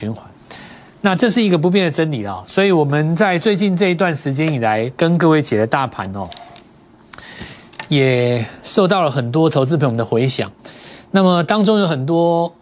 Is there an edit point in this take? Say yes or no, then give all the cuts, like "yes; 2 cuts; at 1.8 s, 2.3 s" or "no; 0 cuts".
no; 0 cuts